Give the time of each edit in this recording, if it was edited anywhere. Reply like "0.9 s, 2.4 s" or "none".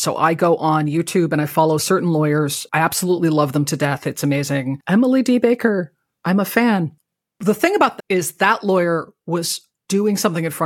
8.0 s